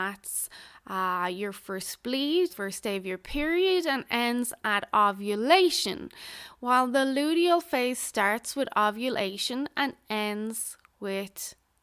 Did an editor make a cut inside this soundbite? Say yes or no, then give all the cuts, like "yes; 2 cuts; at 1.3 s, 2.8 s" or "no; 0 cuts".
yes; 1 cut; at 2.5 s